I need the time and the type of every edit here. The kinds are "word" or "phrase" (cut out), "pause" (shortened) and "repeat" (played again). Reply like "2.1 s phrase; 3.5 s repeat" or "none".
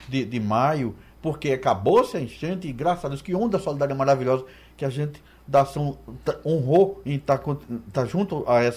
none